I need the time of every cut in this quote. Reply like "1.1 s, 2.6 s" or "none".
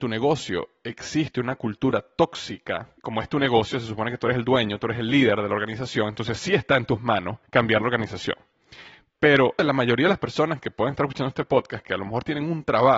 3.0 s, 7.5 s, 9.6 s